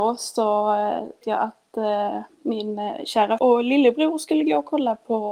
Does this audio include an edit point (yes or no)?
yes